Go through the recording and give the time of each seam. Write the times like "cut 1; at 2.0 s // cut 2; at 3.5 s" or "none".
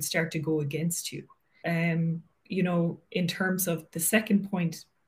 cut 1; at 1.6 s